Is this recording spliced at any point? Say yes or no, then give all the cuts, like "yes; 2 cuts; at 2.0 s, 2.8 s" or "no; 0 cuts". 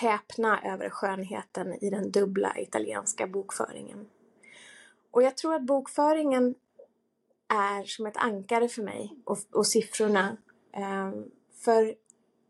no; 0 cuts